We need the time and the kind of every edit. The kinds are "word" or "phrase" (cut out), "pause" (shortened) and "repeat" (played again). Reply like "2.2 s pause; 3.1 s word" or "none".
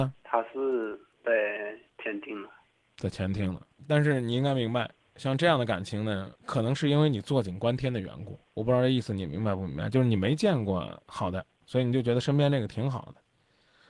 none